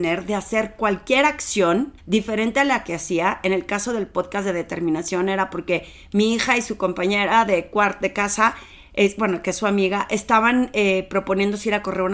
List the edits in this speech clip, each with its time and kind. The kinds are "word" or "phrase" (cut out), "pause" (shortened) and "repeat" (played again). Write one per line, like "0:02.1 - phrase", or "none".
0:02.0 - pause